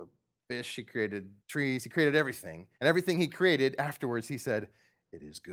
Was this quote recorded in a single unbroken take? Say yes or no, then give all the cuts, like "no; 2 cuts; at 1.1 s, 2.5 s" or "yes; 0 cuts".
no; 2 cuts; at 1.4 s, 2.7 s